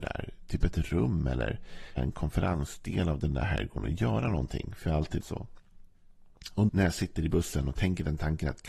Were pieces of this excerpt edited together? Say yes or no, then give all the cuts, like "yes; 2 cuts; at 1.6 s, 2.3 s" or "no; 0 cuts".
yes; 3 cuts; at 2.0 s, 5.2 s, 6.7 s